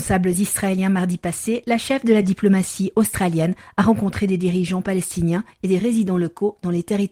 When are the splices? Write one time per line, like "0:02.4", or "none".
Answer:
none